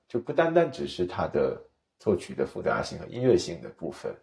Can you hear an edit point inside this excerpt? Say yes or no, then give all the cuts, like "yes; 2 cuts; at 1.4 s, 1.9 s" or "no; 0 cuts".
no; 0 cuts